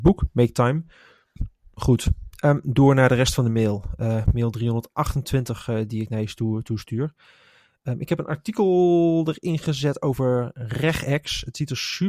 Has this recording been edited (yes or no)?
no